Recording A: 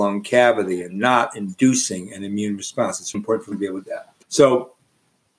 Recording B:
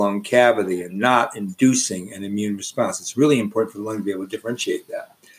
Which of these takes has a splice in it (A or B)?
A